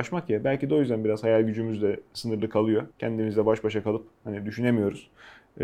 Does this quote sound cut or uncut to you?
cut